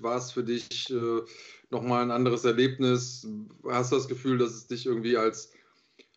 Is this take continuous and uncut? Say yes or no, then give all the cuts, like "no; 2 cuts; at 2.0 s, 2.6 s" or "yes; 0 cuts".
yes; 0 cuts